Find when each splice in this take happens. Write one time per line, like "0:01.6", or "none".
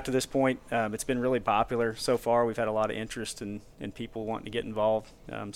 none